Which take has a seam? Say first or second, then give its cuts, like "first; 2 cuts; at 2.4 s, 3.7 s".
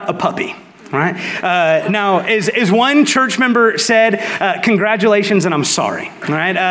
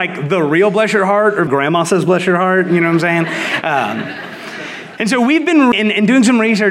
second; 2 cuts; at 1.5 s, 5.7 s